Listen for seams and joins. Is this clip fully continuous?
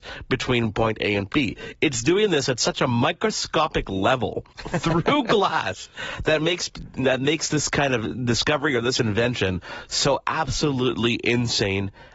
no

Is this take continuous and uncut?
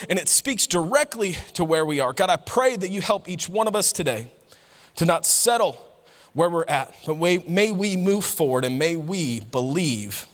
yes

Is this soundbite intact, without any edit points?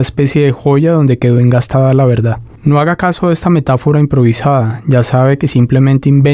yes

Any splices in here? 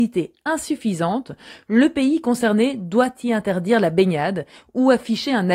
no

